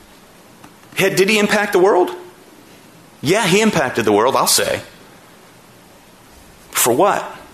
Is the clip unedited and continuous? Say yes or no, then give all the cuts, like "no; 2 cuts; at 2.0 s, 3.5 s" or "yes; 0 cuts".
yes; 0 cuts